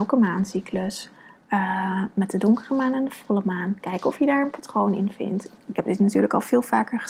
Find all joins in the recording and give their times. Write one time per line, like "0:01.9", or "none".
none